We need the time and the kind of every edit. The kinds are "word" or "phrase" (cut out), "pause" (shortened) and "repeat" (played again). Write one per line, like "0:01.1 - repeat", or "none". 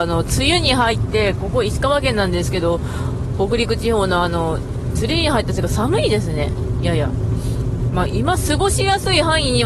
0:01.4 - word